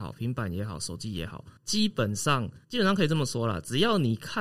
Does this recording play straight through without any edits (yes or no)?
no